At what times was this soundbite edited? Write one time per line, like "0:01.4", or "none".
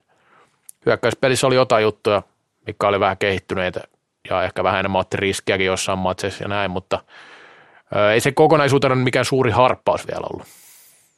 none